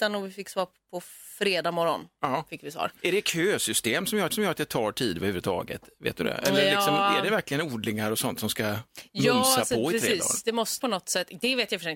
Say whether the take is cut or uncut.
cut